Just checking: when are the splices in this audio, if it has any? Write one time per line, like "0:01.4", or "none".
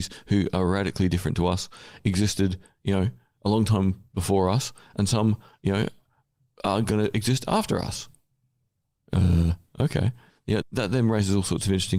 0:10.6